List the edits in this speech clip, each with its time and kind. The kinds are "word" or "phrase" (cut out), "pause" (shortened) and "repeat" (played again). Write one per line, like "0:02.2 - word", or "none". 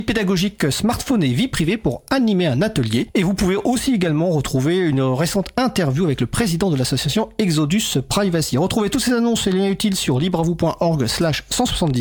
none